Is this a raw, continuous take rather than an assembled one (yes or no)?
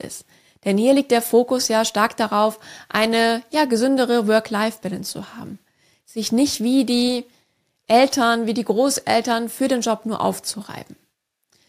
yes